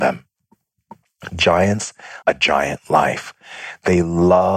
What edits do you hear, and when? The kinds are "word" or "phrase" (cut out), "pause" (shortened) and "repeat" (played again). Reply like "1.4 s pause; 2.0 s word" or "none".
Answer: 2.2 s word